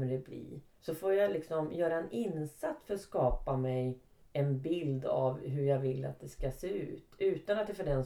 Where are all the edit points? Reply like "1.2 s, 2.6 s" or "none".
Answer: none